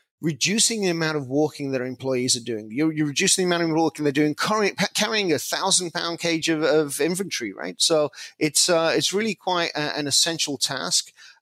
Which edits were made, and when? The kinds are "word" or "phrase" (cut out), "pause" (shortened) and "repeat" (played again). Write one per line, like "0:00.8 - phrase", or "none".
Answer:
none